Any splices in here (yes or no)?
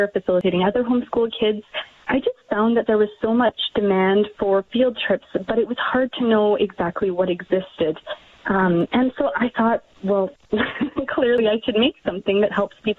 no